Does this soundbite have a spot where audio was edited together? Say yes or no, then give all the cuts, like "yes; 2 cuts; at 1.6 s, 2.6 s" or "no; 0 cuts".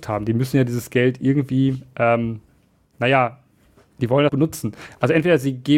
yes; 1 cut; at 4.3 s